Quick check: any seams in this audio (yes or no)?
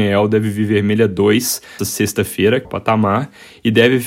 yes